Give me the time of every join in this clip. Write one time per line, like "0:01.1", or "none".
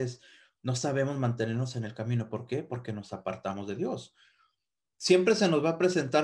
none